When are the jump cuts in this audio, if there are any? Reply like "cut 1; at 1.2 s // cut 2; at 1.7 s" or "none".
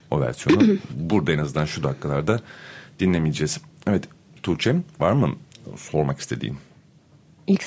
none